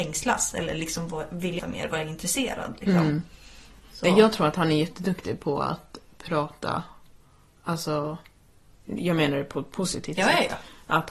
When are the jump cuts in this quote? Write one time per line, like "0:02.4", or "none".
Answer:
0:01.6